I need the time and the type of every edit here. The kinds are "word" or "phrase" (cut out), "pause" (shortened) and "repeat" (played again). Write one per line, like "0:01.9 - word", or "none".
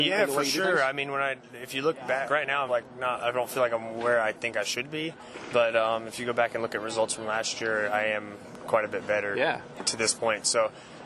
0:02.3 - word
0:02.7 - word